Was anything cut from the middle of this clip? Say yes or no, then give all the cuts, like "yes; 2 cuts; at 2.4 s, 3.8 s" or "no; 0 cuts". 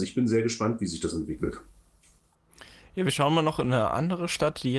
no; 0 cuts